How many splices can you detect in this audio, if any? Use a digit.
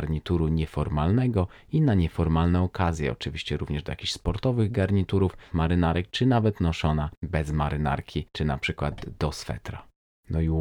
3